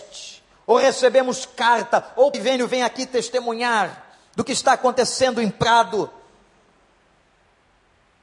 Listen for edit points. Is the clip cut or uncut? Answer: cut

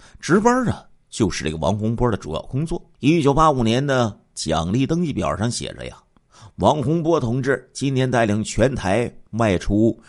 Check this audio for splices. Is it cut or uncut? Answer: cut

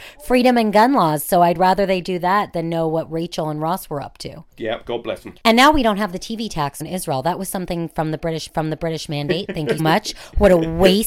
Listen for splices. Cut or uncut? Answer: cut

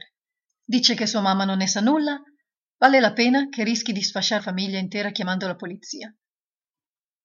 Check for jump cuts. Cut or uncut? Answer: cut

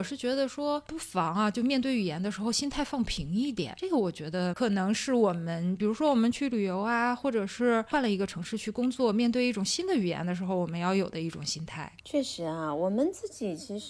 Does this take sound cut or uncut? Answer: cut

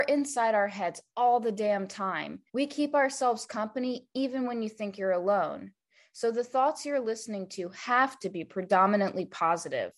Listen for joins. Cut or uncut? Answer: cut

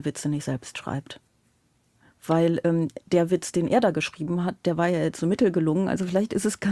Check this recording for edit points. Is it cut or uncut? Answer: uncut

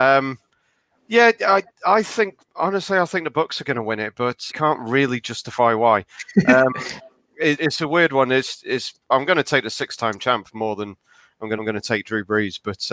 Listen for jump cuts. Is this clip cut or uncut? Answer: cut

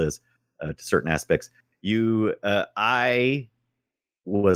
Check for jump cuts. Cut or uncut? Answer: uncut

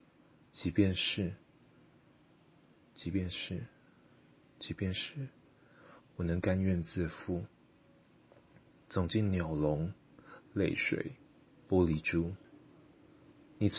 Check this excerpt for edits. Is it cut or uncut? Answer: uncut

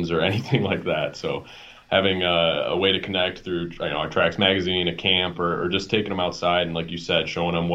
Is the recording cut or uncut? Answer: uncut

